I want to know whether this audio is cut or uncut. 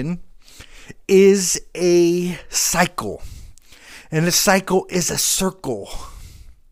uncut